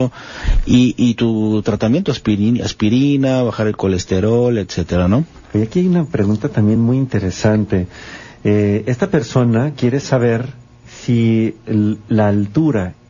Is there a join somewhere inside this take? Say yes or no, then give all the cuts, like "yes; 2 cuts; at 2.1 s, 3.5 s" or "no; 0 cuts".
no; 0 cuts